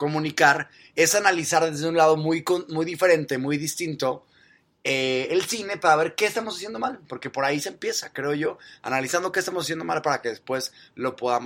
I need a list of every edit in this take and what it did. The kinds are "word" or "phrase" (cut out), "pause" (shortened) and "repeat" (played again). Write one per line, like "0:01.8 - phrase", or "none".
none